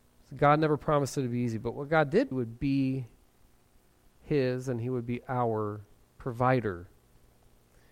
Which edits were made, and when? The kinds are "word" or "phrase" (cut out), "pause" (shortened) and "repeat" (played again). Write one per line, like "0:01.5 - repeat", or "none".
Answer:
0:02.3 - phrase